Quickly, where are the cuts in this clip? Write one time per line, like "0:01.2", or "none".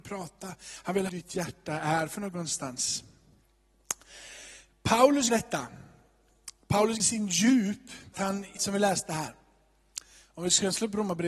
0:01.1
0:05.3
0:07.0
0:08.1
0:08.6